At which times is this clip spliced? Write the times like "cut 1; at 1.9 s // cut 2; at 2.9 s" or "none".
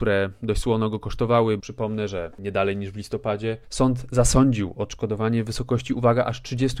cut 1; at 1.6 s

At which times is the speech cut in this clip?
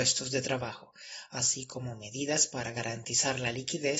none

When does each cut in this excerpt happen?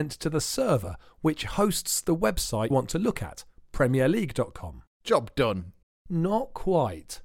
cut 1; at 2.7 s // cut 2; at 4.9 s // cut 3; at 5.8 s

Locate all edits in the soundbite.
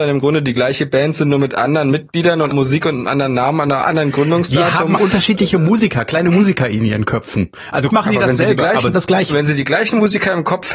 cut 1; at 2.5 s // cut 2; at 5.0 s // cut 3; at 7.9 s // cut 4; at 8.9 s

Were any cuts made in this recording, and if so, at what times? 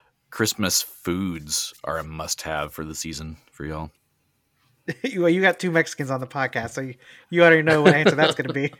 cut 1; at 4.0 s

